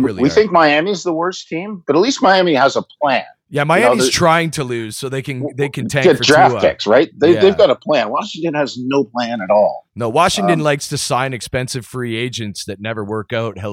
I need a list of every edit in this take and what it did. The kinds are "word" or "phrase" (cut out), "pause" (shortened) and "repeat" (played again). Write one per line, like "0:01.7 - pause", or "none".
none